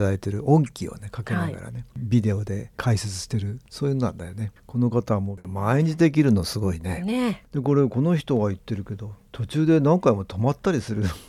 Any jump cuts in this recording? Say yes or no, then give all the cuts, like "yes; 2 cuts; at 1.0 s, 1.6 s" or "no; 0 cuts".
yes; 1 cut; at 4.6 s